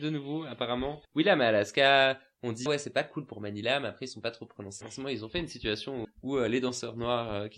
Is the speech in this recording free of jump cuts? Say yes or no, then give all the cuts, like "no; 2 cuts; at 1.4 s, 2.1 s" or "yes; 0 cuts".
no; 4 cuts; at 1.0 s, 2.7 s, 4.8 s, 6.0 s